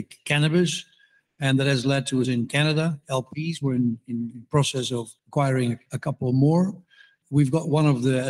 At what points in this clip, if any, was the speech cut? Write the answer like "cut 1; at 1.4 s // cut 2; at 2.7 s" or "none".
cut 1; at 2.2 s // cut 2; at 5.2 s